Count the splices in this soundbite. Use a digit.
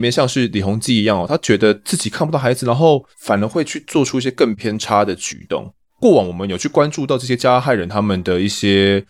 1